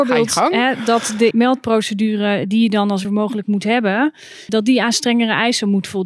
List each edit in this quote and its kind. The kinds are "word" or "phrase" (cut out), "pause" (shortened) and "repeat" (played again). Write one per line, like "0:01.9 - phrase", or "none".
0:01.3 - word
0:03.0 - word
0:04.5 - word